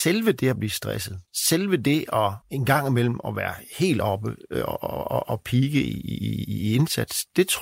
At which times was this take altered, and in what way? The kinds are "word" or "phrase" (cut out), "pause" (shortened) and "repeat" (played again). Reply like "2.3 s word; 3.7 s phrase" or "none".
1.3 s pause; 2.4 s pause